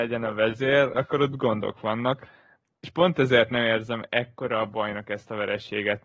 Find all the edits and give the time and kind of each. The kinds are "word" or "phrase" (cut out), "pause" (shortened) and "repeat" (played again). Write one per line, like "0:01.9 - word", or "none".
0:00.9 - word